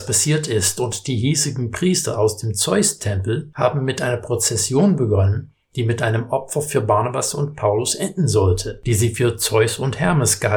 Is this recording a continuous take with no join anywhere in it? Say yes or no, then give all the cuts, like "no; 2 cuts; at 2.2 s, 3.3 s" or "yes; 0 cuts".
yes; 0 cuts